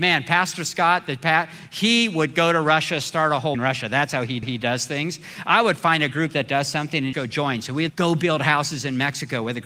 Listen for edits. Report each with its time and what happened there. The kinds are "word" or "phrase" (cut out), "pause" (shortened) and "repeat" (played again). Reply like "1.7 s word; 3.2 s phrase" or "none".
3.5 s word; 4.4 s repeat; 7.1 s word; 7.9 s word